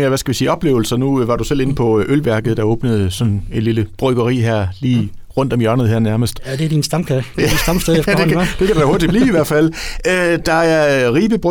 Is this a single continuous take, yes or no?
yes